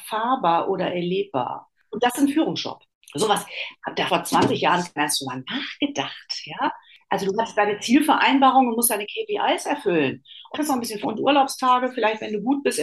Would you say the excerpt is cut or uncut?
cut